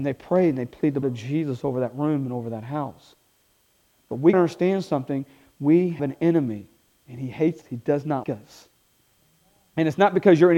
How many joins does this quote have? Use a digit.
5